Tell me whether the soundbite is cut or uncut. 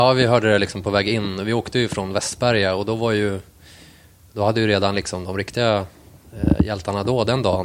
uncut